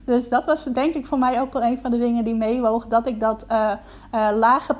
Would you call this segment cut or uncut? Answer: uncut